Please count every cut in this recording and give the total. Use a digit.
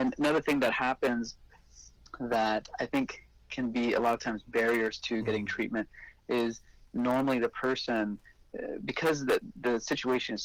0